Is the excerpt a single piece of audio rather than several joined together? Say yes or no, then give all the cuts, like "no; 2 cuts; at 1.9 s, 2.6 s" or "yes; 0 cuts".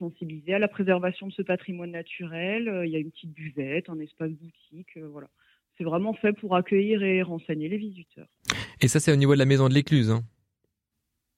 yes; 0 cuts